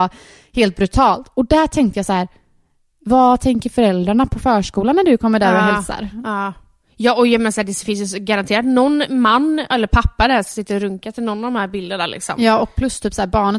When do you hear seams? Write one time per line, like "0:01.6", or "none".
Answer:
none